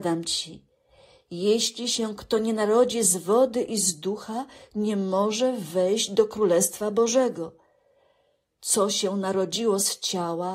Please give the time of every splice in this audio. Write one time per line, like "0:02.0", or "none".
none